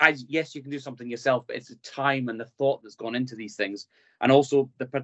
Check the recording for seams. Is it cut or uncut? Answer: uncut